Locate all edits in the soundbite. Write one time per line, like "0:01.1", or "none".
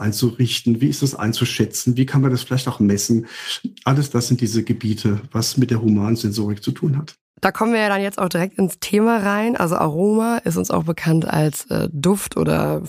none